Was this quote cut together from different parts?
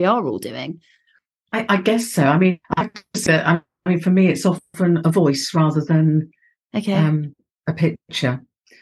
no; 0 cuts

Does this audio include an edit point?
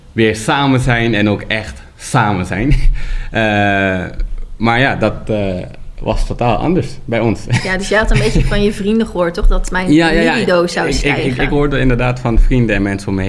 no; 0 cuts

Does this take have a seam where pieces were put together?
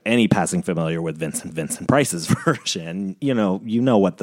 yes; 2 cuts; at 1.5 s, 3.2 s

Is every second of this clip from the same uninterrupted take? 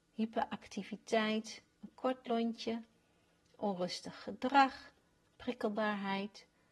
yes; 0 cuts

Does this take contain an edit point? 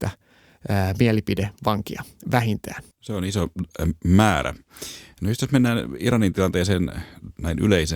yes; 1 cut; at 2.9 s

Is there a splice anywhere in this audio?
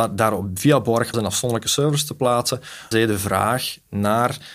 yes; 2 cuts; at 1.1 s, 2.9 s

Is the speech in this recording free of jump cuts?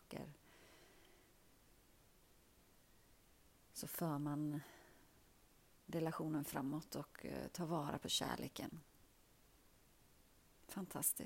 yes; 0 cuts

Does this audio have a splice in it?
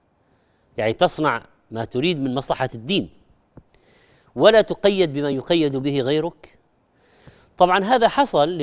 no; 0 cuts

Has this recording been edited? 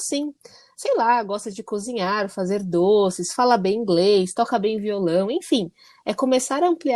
no; 0 cuts

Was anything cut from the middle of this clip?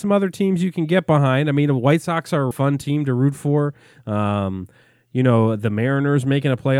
yes; 1 cut; at 2.5 s

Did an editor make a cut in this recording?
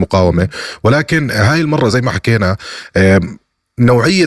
no; 0 cuts

